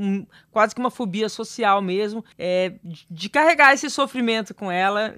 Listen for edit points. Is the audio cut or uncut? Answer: cut